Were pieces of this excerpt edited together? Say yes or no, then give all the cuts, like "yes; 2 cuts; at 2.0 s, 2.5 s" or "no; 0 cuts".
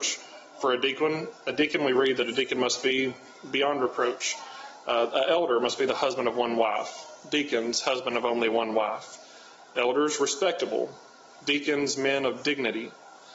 no; 0 cuts